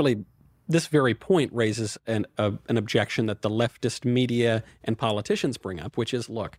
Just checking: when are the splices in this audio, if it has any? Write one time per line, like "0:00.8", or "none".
none